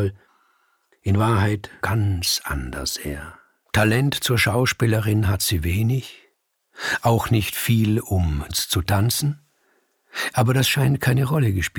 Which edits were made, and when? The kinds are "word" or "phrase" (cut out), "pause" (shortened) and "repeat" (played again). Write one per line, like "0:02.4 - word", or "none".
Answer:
0:01.8 - phrase
0:03.6 - pause
0:08.5 - phrase